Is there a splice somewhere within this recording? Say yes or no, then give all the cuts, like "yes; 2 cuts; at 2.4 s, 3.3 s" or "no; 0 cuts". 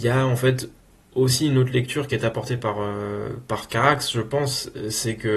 no; 0 cuts